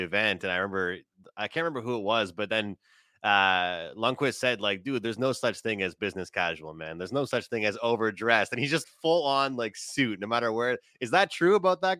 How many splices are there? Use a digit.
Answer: 1